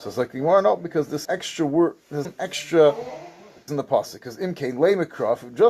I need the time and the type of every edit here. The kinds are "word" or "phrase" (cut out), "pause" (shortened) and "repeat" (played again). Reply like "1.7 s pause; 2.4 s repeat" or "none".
1.2 s word; 2.2 s word; 3.7 s word